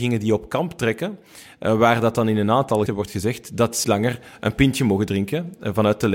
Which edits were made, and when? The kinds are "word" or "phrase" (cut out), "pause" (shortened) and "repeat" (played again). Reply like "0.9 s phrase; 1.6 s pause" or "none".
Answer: 2.9 s word; 3.8 s word